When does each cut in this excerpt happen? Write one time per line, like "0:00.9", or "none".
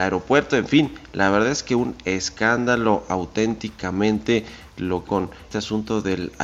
0:05.1
0:05.5